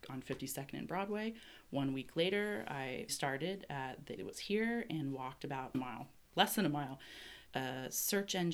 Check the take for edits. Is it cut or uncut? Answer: cut